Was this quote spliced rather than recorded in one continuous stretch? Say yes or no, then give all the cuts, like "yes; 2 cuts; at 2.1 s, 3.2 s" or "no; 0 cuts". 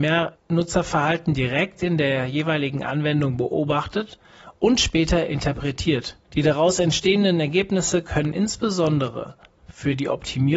yes; 1 cut; at 6.2 s